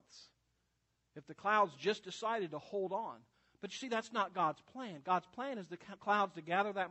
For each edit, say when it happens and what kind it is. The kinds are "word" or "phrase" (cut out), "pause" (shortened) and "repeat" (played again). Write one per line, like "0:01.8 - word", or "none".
none